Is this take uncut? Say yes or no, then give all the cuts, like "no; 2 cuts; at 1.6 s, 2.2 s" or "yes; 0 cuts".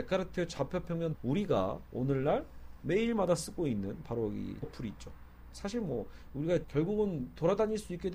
no; 3 cuts; at 1.1 s, 4.6 s, 6.6 s